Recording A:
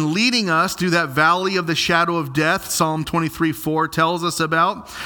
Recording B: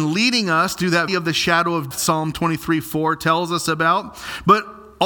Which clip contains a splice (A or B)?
B